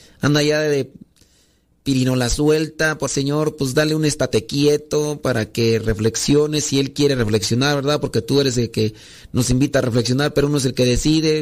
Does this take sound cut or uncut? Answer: cut